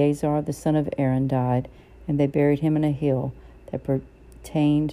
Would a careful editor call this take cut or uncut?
uncut